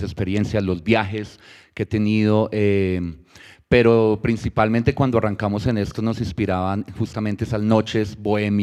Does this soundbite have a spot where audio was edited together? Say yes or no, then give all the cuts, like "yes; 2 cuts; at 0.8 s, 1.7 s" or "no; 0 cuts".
no; 0 cuts